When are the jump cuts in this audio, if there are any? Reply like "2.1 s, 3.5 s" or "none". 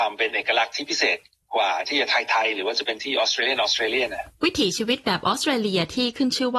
1.4 s